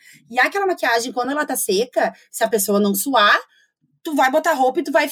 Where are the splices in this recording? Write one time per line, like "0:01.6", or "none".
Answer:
none